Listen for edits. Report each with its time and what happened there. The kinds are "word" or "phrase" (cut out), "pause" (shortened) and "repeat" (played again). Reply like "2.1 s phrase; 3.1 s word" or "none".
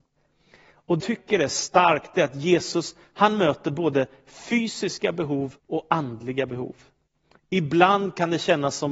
1.0 s word; 5.6 s pause